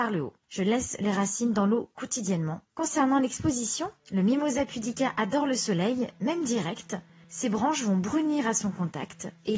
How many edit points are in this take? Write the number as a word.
zero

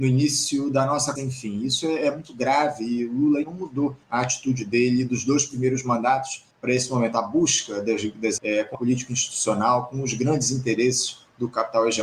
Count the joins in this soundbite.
six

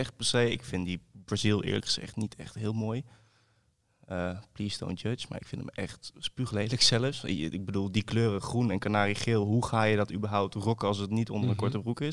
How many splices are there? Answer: zero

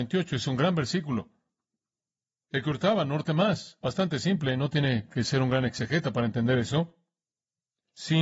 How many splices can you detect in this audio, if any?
zero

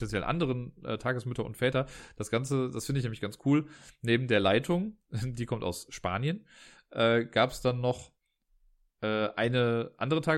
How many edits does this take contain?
zero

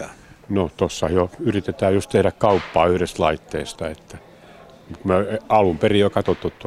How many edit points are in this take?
zero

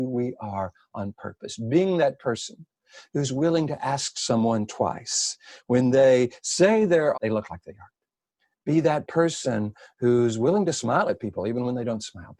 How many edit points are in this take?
one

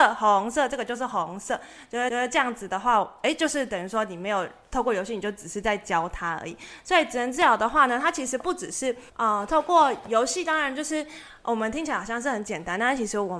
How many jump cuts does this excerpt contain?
two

